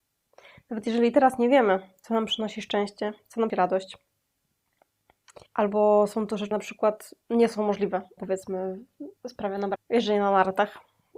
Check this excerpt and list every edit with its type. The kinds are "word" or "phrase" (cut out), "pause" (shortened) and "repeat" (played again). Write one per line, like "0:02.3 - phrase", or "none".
0:03.5 - word
0:05.5 - pause
0:06.5 - word
0:07.2 - pause
0:08.2 - word
0:09.2 - pause
0:09.8 - word